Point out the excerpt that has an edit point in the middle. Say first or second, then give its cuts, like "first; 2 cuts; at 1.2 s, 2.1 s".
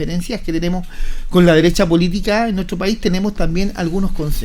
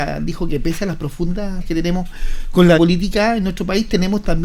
second; 2 cuts; at 1.6 s, 2.8 s